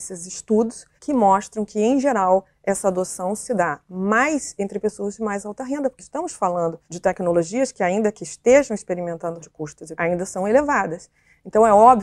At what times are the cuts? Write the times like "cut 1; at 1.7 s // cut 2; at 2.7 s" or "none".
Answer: cut 1; at 1.0 s // cut 2; at 6.0 s // cut 3; at 6.8 s // cut 4; at 9.4 s // cut 5; at 10.0 s